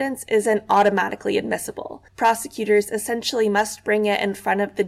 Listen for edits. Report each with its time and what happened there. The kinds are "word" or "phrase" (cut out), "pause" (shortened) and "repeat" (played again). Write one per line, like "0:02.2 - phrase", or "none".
0:02.1 - pause